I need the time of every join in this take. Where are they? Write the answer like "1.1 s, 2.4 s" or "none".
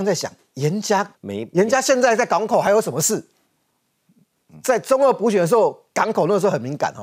1.1 s